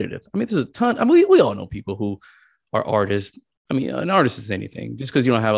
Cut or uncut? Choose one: uncut